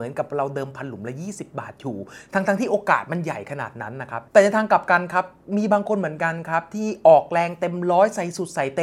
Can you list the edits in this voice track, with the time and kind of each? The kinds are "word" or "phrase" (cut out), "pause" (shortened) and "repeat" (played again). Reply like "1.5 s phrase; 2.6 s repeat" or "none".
4.3 s pause